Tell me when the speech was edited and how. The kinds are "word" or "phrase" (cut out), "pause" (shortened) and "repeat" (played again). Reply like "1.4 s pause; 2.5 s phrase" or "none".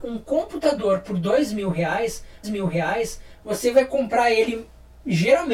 2.4 s repeat